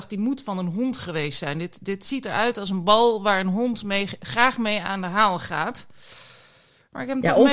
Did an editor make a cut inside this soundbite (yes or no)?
no